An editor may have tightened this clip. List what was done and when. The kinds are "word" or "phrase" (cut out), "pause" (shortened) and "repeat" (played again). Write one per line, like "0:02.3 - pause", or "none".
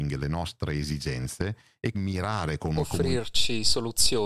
0:01.9 - word